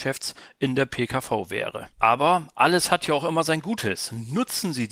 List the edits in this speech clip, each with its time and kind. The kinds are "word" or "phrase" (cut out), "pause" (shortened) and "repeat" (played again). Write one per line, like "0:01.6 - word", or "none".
0:01.9 - pause